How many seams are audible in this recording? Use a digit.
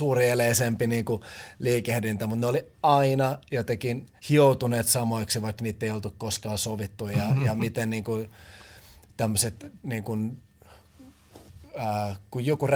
3